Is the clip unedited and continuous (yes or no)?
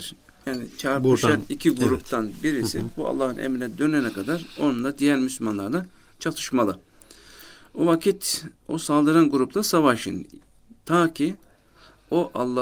yes